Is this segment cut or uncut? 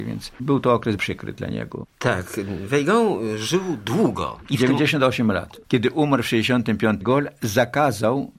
cut